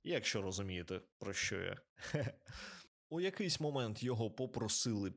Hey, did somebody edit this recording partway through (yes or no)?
no